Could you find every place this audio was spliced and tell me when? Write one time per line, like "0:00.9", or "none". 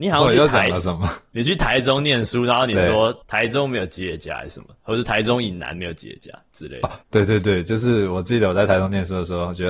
0:03.2
0:07.0